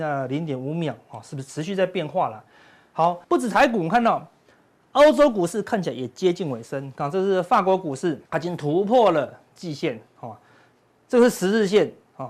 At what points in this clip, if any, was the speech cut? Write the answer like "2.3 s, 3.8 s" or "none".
3.2 s, 8.3 s